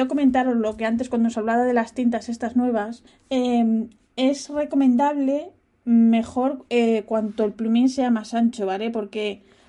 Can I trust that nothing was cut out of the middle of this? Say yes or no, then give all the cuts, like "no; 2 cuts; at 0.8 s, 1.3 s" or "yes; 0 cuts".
yes; 0 cuts